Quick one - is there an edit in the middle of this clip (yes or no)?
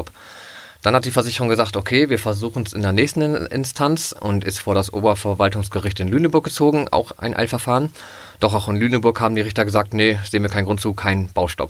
no